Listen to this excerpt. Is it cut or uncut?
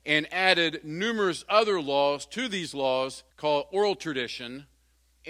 cut